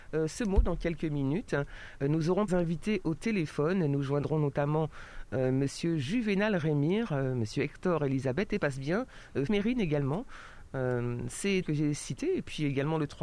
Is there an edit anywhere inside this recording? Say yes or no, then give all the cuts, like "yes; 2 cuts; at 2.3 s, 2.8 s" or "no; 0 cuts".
yes; 4 cuts; at 2.5 s, 8.6 s, 9.5 s, 11.6 s